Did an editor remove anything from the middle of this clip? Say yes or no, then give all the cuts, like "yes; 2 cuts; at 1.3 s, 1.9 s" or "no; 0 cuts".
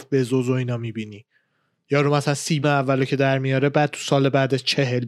yes; 1 cut; at 2.6 s